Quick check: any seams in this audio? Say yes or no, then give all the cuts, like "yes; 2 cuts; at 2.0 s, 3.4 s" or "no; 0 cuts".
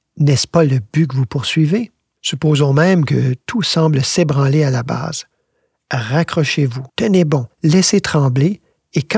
yes; 1 cut; at 6.9 s